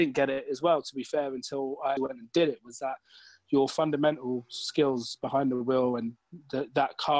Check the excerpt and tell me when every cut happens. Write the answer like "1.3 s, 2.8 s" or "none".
2.0 s